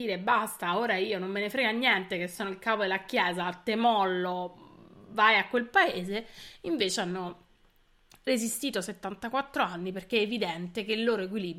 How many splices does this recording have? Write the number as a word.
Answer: zero